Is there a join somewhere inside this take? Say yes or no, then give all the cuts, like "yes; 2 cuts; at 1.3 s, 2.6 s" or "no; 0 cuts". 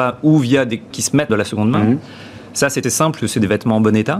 yes; 4 cuts; at 0.9 s, 1.3 s, 2.8 s, 3.2 s